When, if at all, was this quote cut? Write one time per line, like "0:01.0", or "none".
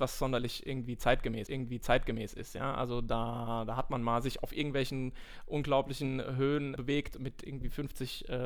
0:01.5
0:06.8

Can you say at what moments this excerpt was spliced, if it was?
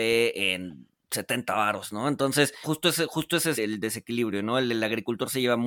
0:01.0
0:02.6
0:03.5

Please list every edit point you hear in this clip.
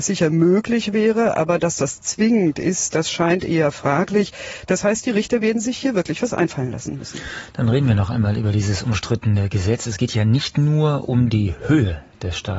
none

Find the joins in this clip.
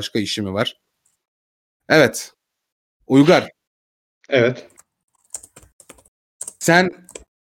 0:03.7

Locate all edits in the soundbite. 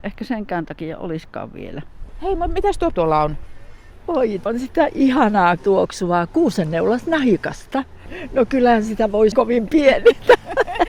0:02.9
0:04.5
0:05.6
0:09.3

